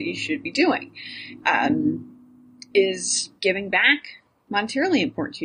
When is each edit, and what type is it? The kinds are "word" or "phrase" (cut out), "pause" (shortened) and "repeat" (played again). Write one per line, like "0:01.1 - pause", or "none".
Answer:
0:03.4 - pause